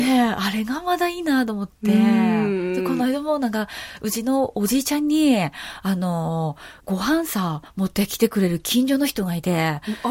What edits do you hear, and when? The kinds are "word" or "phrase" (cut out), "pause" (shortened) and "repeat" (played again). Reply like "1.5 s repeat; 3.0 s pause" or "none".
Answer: 6.8 s pause